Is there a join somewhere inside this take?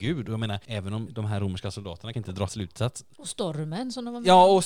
yes; 3 cuts; at 1.1 s, 2.1 s, 2.5 s

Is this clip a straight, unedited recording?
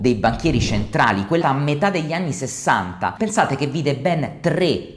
no; 1 cut; at 1.4 s

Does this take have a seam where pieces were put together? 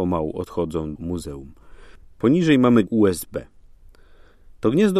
yes; 2 cuts; at 1.0 s, 2.9 s

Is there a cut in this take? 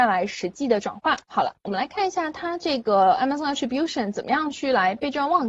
yes; 1 cut; at 1.2 s

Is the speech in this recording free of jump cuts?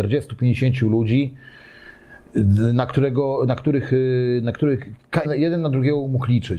no; 1 cut; at 5.2 s

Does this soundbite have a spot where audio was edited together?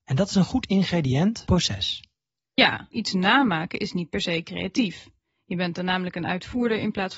yes; 2 cuts; at 1.5 s, 2.9 s

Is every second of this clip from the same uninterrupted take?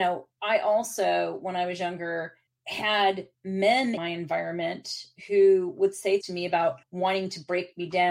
no; 4 cuts; at 2.5 s, 4.0 s, 6.2 s, 6.8 s

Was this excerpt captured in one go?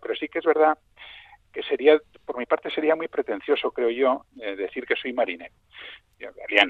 yes; 0 cuts

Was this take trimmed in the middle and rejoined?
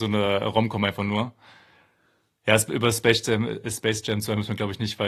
no; 0 cuts

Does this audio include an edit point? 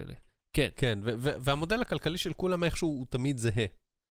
no; 0 cuts

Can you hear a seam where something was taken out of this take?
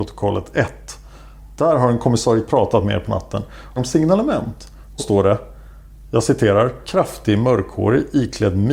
yes; 4 cuts; at 2.5 s, 3.8 s, 5.0 s, 6.8 s

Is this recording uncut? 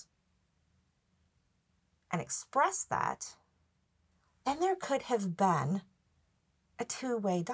yes; 0 cuts

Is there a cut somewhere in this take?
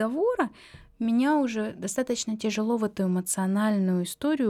no; 0 cuts

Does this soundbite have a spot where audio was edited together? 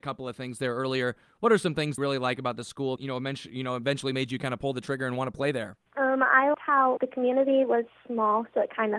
yes; 5 cuts; at 2.0 s, 3.0 s, 5.9 s, 6.5 s, 7.0 s

